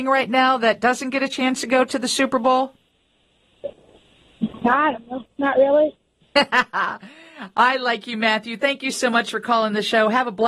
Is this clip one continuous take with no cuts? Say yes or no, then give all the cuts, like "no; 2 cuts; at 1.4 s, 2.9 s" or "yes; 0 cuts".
yes; 0 cuts